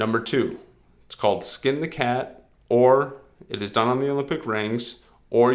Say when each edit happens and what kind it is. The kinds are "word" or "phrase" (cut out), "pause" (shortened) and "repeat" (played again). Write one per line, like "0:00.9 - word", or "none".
none